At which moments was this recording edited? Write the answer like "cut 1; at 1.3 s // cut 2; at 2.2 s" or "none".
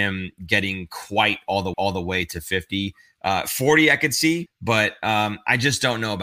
cut 1; at 1.7 s // cut 2; at 4.5 s